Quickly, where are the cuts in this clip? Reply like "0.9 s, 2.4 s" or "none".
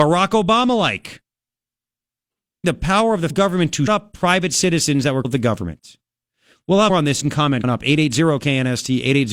2.6 s, 3.3 s, 3.9 s, 5.2 s, 6.9 s, 7.2 s, 7.6 s